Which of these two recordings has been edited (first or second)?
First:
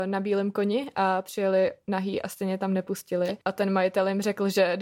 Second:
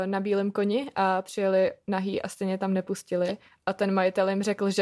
first